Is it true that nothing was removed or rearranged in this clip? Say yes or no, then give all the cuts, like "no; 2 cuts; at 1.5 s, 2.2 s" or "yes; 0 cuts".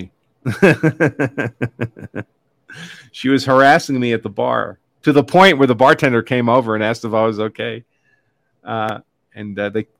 yes; 0 cuts